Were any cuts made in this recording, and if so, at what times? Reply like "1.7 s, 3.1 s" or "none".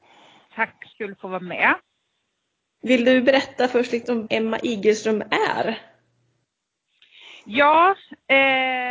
0.9 s, 4.3 s